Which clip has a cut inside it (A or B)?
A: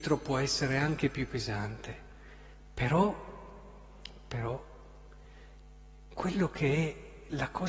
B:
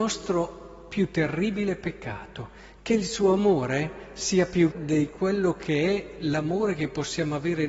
B